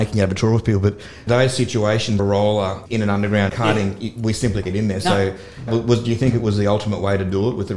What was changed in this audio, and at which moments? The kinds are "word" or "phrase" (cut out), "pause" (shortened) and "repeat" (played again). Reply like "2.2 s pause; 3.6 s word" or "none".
1.3 s word; 2.2 s word; 2.9 s word; 3.5 s word; 4.6 s word; 5.7 s word